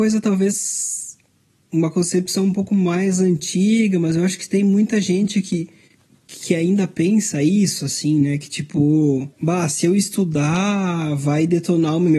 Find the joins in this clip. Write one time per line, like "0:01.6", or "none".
0:09.3